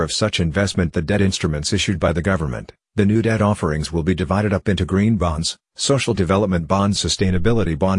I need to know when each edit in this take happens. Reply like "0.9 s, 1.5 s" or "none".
7.0 s